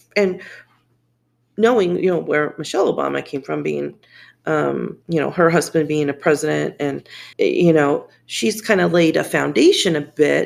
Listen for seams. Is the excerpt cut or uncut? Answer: cut